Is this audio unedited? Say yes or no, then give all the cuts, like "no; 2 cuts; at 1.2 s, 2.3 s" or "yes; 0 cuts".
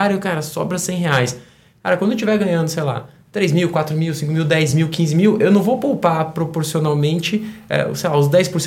yes; 0 cuts